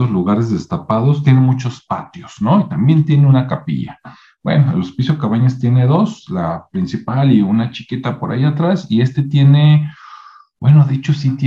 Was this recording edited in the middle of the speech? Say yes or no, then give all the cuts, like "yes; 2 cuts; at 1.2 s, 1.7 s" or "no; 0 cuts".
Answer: no; 0 cuts